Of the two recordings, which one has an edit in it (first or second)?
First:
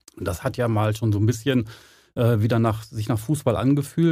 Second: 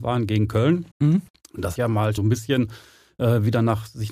second